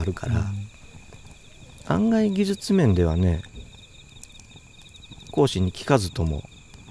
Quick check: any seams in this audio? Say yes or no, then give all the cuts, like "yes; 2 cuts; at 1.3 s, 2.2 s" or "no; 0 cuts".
no; 0 cuts